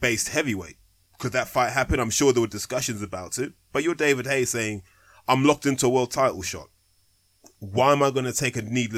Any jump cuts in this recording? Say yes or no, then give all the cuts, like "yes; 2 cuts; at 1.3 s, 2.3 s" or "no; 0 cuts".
no; 0 cuts